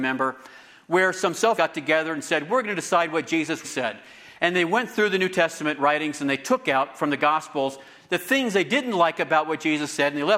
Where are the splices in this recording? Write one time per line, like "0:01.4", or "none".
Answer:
0:01.6
0:03.6